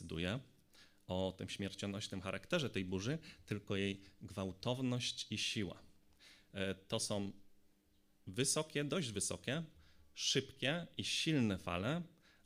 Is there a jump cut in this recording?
no; 0 cuts

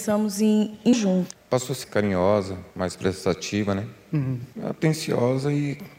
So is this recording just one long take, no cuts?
no; 4 cuts; at 0.9 s, 1.8 s, 2.7 s, 4.5 s

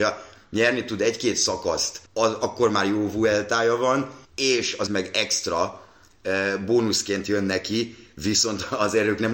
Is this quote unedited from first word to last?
no; 3 cuts; at 2.1 s, 4.2 s, 4.9 s

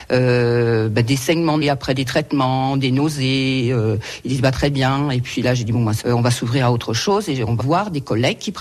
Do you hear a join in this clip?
yes; 3 cuts; at 1.6 s, 6.0 s, 7.6 s

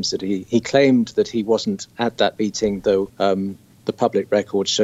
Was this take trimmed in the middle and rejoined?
no; 0 cuts

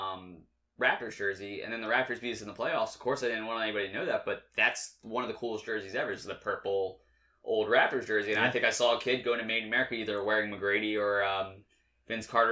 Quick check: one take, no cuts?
yes; 0 cuts

